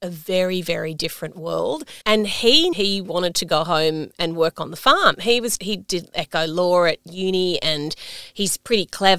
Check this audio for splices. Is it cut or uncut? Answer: cut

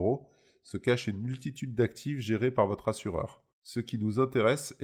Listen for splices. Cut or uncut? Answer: cut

